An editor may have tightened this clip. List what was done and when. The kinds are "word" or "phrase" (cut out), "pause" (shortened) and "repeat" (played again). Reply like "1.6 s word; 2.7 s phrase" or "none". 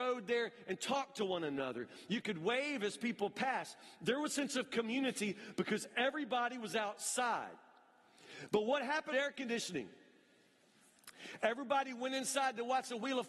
4.3 s word; 9.1 s phrase